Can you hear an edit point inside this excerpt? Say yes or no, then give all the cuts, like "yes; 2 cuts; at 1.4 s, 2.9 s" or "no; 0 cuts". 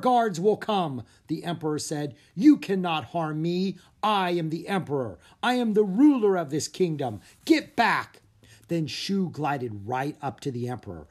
no; 0 cuts